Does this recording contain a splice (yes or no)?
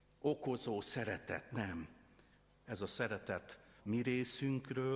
yes